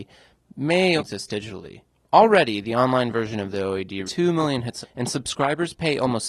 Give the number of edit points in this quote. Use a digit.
4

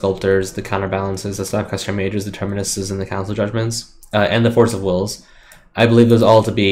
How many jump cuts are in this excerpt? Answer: 0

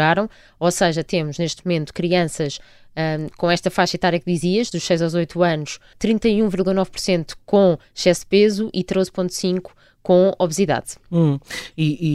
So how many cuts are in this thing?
1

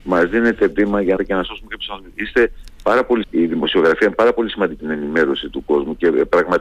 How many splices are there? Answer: 3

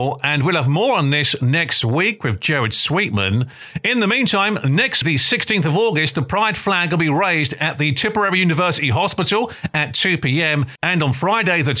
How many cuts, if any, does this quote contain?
1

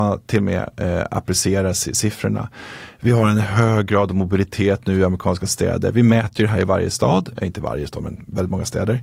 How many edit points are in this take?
0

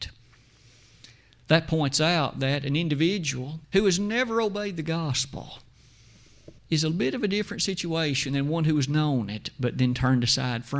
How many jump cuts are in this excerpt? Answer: 2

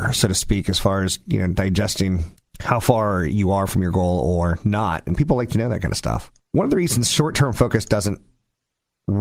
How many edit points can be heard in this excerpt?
2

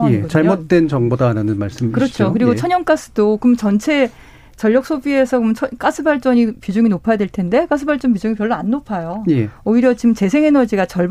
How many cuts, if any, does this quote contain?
0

